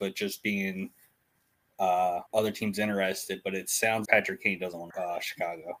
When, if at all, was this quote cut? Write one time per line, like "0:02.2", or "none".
0:02.3
0:04.0
0:04.9